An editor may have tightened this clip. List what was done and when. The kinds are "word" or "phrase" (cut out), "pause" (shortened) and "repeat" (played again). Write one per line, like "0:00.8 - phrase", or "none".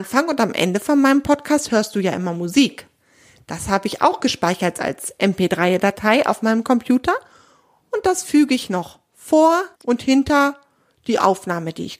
0:09.7 - pause